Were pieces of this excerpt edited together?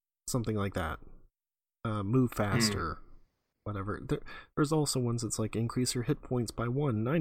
no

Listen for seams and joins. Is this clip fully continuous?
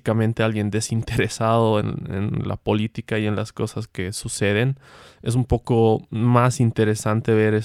yes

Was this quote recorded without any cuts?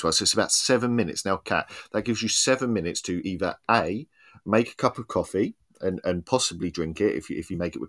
yes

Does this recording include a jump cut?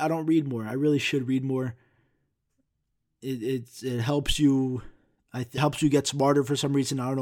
yes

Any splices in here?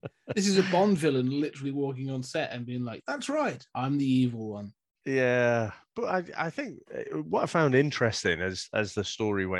no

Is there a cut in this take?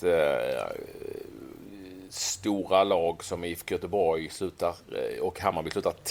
no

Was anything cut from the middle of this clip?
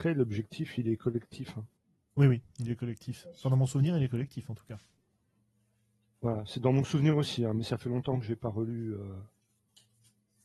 no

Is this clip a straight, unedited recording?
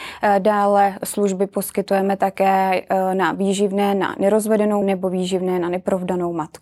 no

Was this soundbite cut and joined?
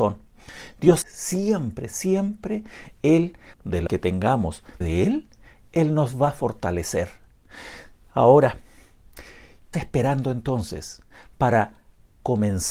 yes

